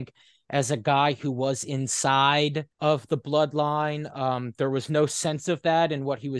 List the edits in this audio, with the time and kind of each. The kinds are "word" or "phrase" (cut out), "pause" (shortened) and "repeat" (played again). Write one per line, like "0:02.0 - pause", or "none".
0:02.7 - pause

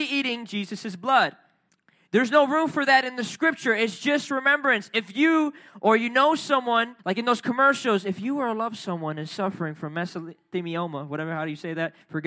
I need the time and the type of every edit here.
0:01.7 - pause
0:07.0 - pause

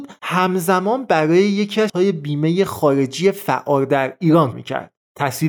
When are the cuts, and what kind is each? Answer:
0:01.9 - word
0:04.5 - word

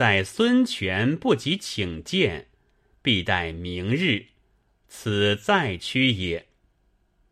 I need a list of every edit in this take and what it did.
none

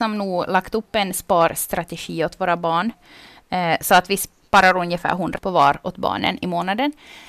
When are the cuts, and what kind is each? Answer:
0:05.4 - word

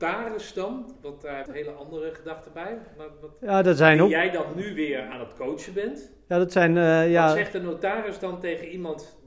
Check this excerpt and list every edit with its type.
0:01.5 - phrase

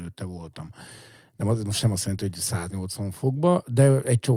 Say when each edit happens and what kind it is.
none

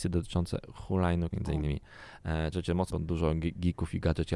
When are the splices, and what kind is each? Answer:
0:01.3 - word
0:02.5 - word
0:02.9 - word

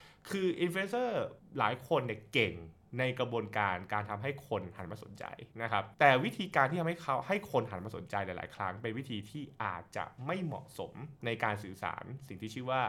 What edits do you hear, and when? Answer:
0:01.4 - pause
0:05.5 - pause
0:05.9 - pause
0:11.2 - pause

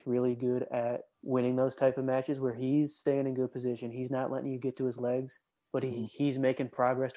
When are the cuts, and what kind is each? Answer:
0:01.1 - pause
0:05.5 - pause

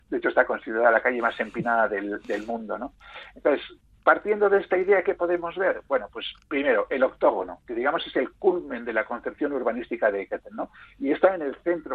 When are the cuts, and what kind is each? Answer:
none

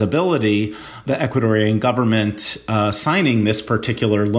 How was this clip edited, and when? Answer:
0:01.0 - word

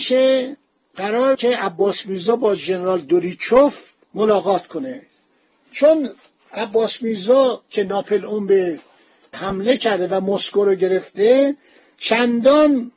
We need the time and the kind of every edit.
0:01.3 - word
0:07.7 - word
0:09.3 - word

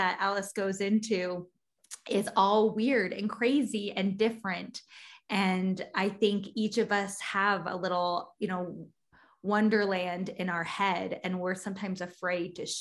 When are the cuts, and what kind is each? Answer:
none

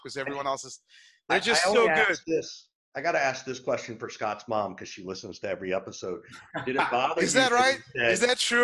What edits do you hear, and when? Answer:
none

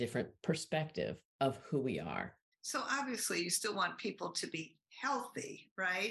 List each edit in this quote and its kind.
0:01.3 - pause
0:02.5 - pause

